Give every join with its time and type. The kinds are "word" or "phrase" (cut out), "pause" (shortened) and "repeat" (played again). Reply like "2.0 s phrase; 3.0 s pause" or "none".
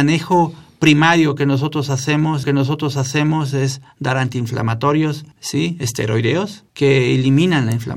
2.4 s repeat